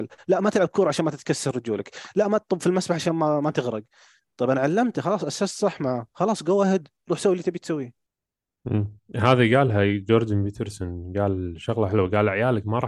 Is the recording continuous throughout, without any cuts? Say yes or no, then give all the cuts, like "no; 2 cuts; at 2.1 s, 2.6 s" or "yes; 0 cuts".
yes; 0 cuts